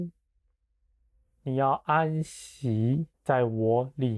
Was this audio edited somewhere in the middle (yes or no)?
yes